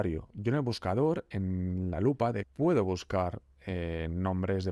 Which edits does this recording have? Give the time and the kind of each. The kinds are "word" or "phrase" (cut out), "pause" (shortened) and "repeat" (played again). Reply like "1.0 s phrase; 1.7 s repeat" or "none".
2.4 s word